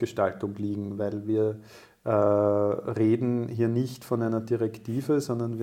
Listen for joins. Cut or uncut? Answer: uncut